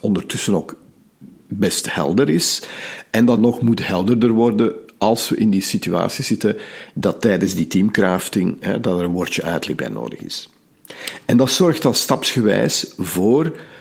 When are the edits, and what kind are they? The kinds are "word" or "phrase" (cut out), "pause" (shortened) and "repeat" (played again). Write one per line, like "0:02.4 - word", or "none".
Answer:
0:03.4 - word